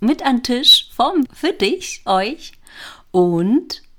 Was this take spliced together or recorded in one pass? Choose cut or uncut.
cut